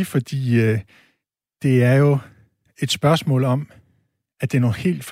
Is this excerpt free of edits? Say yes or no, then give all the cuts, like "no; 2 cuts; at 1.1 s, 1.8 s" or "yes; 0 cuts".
yes; 0 cuts